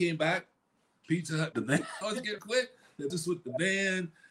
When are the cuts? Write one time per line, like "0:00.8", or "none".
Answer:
0:01.5
0:02.0
0:02.4
0:03.1